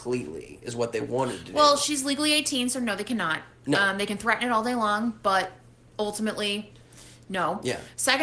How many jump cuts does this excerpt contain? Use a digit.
0